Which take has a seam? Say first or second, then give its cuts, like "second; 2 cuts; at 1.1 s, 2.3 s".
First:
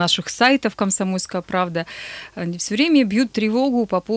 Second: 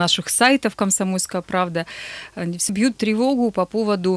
second; 1 cut; at 2.7 s